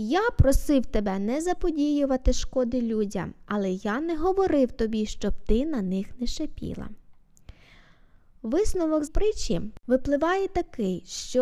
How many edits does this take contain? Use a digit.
1